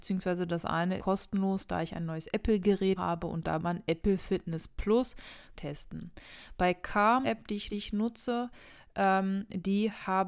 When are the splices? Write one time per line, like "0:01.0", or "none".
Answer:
0:01.0
0:03.0
0:03.6
0:05.5
0:07.2
0:07.7